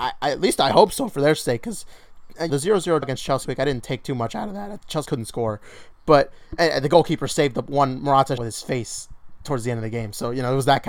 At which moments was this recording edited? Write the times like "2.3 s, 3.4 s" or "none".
2.5 s, 3.0 s, 3.4 s, 5.1 s, 8.4 s